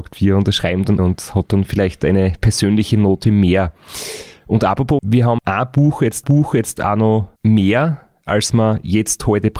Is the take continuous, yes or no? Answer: no